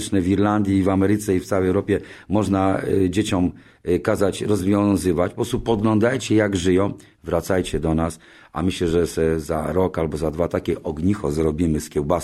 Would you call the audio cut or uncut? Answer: uncut